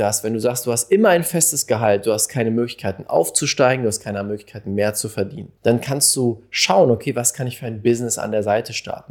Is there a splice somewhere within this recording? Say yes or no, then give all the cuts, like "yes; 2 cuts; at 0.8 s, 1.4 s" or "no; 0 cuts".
yes; 1 cut; at 5.6 s